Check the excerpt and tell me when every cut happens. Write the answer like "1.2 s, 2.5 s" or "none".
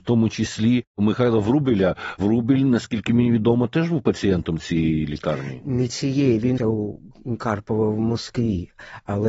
6.6 s